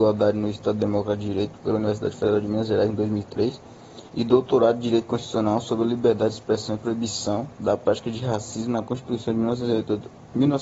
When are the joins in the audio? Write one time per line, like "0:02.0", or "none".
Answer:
0:04.1
0:07.5